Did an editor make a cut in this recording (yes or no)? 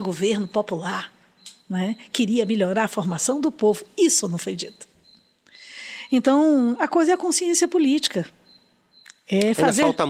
no